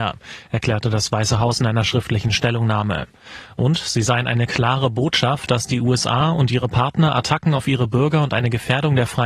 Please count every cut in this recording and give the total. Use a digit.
0